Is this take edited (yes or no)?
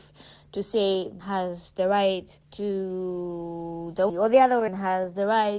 yes